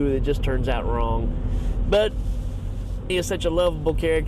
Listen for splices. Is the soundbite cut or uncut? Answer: cut